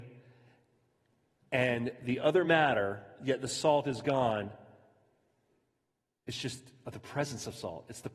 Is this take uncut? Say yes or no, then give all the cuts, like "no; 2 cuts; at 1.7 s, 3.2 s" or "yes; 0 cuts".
yes; 0 cuts